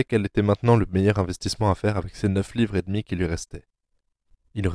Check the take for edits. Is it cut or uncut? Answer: uncut